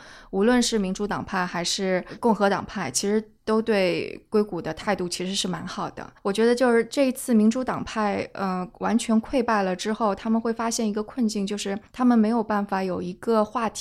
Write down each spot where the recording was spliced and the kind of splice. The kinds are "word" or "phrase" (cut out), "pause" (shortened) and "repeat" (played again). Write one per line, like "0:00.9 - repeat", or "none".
0:06.2 - pause
0:11.9 - pause